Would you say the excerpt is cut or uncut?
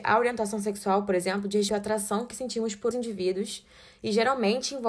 cut